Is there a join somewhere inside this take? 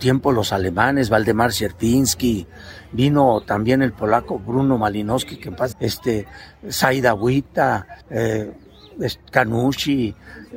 yes; 2 cuts; at 5.7 s, 8.0 s

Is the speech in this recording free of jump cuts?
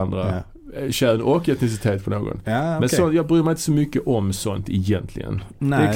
yes; 0 cuts

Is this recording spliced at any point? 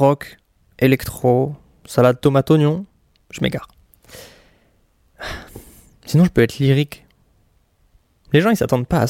no; 0 cuts

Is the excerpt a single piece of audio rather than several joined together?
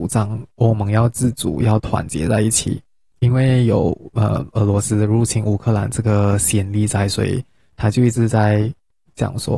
yes; 0 cuts

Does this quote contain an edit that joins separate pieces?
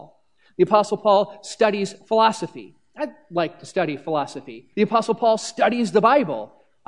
yes; 1 cut; at 4.7 s

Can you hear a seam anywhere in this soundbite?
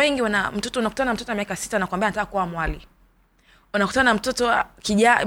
no; 0 cuts

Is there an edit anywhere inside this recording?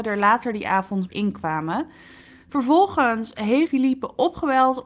yes; 2 cuts; at 1.1 s, 3.7 s

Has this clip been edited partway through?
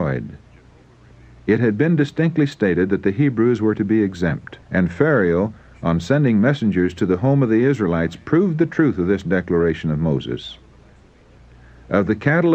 yes; 1 cut; at 4.6 s

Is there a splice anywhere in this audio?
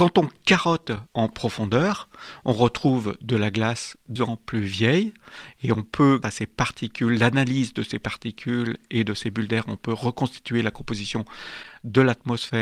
yes; 3 cuts; at 1.1 s, 4.2 s, 6.2 s

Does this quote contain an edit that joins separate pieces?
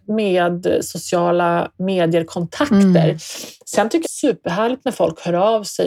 yes; 1 cut; at 4.0 s

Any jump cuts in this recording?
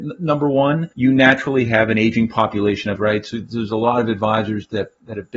yes; 2 cuts; at 0.9 s, 3.0 s

